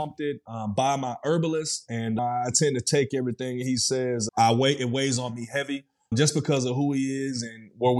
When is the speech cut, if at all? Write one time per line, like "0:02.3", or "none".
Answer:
none